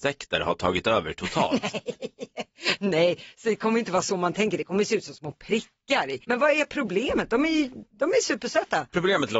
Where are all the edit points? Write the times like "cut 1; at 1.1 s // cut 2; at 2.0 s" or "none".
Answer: cut 1; at 6.2 s